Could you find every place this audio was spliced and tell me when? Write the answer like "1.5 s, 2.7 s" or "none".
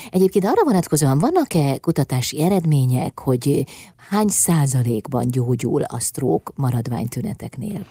none